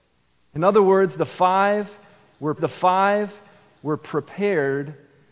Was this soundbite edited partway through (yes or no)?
yes